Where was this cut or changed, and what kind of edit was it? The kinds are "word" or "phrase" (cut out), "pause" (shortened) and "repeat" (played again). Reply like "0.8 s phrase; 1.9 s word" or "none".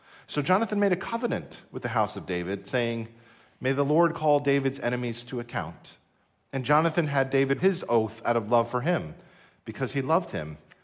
7.6 s word